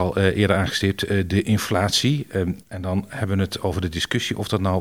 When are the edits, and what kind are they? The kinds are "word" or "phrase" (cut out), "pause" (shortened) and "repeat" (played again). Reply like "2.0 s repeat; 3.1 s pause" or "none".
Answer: 2.6 s pause